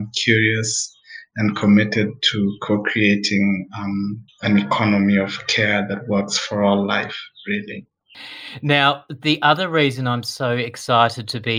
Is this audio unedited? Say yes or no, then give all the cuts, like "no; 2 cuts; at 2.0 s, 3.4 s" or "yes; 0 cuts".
no; 1 cut; at 4.3 s